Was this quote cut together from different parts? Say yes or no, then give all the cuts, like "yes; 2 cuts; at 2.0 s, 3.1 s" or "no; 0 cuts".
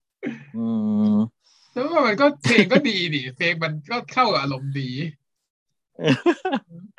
no; 0 cuts